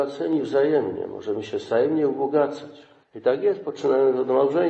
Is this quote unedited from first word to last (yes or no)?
yes